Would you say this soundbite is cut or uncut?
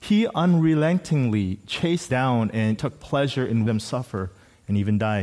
cut